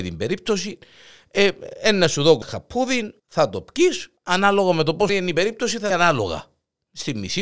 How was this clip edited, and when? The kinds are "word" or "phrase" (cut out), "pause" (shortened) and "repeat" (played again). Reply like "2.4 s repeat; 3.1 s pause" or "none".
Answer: 2.4 s word; 3.2 s pause; 4.2 s pause; 5.1 s word; 5.9 s phrase